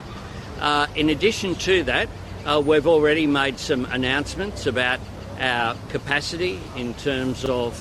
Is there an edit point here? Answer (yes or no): no